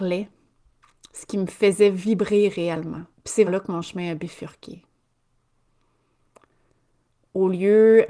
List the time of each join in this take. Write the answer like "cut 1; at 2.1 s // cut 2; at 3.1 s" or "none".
cut 1; at 3.1 s // cut 2; at 3.5 s